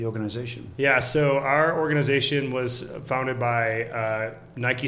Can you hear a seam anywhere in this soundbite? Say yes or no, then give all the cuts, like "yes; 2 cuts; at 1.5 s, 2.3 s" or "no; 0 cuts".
no; 0 cuts